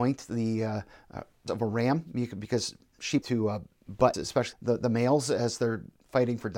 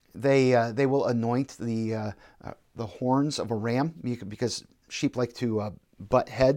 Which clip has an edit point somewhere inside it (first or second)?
first